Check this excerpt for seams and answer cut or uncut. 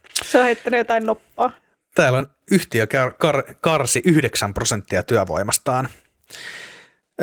uncut